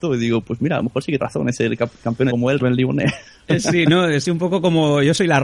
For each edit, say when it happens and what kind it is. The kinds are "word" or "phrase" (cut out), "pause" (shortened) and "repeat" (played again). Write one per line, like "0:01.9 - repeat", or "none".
0:01.2 - word
0:02.3 - word
0:02.6 - phrase